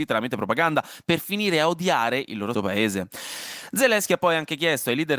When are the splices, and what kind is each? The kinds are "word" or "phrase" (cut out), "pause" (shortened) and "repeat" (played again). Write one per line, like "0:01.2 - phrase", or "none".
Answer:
0:02.5 - word